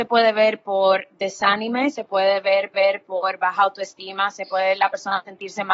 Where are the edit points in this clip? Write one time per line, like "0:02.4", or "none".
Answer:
0:02.7